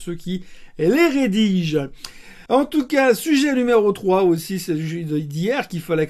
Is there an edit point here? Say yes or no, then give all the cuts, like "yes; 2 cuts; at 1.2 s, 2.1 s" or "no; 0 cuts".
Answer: yes; 1 cut; at 2.5 s